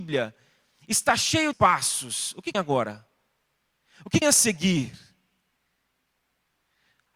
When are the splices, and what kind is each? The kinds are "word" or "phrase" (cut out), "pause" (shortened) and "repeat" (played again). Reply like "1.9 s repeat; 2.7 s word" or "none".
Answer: 1.5 s word; 2.5 s word; 4.2 s word

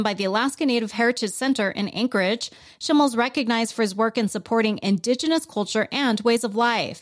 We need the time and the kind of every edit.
none

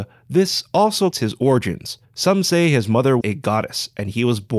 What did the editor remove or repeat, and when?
1.1 s word; 2.0 s pause; 3.2 s word

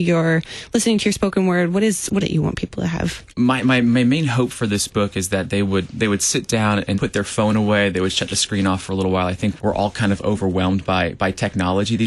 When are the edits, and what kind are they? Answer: 2.2 s phrase; 3.3 s pause; 6.9 s phrase; 9.6 s word

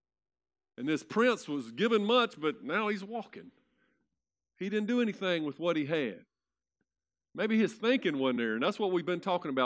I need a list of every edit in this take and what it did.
none

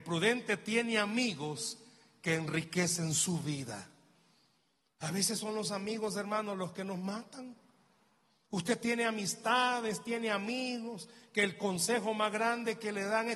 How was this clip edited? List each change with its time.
none

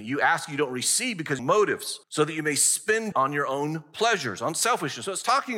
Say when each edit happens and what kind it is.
1.4 s phrase; 2.0 s pause; 3.1 s word

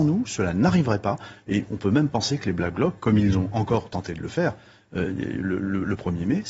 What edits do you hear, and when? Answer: none

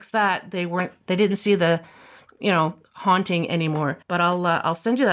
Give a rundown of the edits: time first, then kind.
4.0 s pause

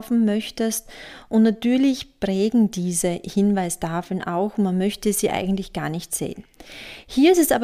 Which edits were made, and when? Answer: none

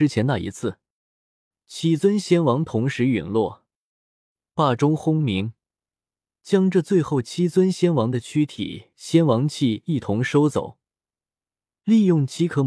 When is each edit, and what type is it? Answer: 8.9 s phrase

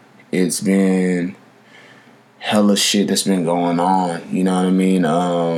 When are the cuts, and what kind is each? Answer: none

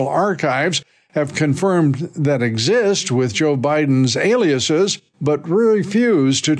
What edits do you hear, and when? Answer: 5.1 s pause

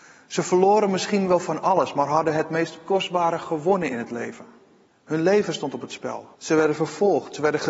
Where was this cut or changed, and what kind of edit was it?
4.9 s pause; 6.3 s pause

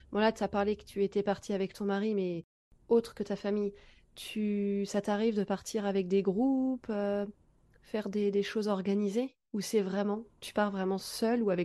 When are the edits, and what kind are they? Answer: none

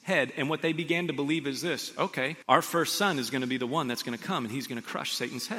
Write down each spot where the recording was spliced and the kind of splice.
2.4 s pause

